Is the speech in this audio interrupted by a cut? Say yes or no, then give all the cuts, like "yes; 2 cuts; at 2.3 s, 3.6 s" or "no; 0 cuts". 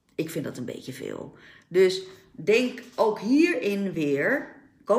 no; 0 cuts